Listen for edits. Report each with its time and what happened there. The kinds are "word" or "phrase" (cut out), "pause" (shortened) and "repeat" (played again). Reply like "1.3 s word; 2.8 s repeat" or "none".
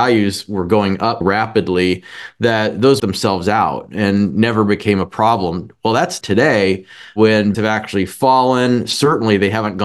1.2 s word; 3.0 s phrase; 6.2 s phrase; 7.5 s word